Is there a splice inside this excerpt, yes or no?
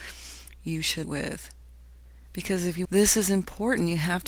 yes